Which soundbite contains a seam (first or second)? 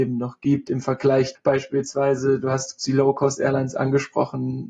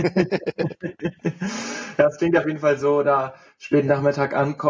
first